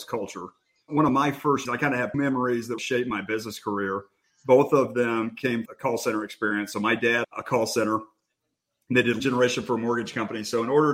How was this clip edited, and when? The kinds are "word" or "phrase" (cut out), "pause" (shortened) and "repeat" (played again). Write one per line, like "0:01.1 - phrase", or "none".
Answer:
0:01.7 - word
0:02.1 - word
0:02.8 - word
0:05.7 - word
0:07.2 - word
0:09.2 - word

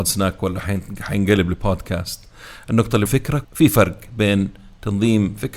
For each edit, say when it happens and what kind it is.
0:03.1 - phrase
0:03.4 - word

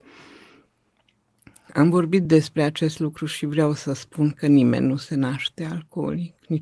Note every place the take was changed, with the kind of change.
none

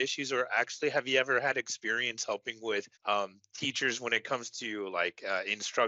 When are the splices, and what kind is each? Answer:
0:02.9 - pause

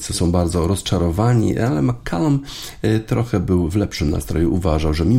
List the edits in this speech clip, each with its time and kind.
none

